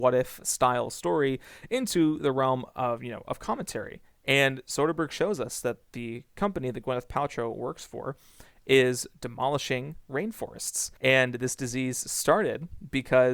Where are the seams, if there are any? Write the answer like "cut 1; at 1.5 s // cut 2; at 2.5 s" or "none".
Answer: cut 1; at 11.0 s